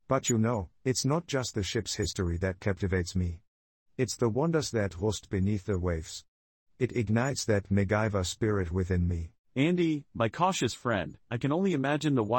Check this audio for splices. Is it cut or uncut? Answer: uncut